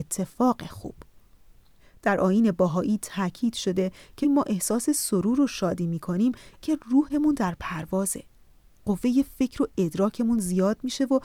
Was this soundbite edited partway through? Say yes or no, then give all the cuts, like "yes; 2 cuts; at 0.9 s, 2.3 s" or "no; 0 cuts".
yes; 2 cuts; at 4.2 s, 6.6 s